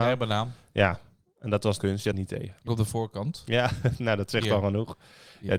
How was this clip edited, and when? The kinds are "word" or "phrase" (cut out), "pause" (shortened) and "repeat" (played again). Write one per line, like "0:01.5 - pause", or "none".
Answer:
0:01.8 - word
0:02.1 - phrase
0:02.7 - phrase